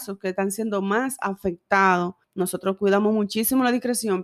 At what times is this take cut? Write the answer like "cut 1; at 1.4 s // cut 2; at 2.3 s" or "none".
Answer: cut 1; at 2.2 s